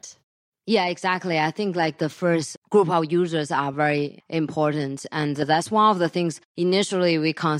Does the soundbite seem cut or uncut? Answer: uncut